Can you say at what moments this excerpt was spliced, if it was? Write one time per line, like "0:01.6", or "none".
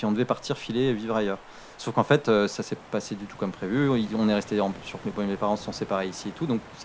0:02.8
0:05.0